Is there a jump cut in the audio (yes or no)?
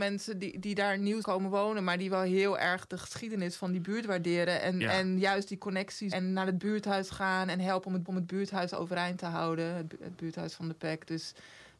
yes